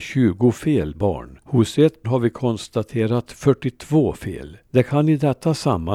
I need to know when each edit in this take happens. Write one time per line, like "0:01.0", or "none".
0:00.9
0:01.4
0:02.0
0:04.6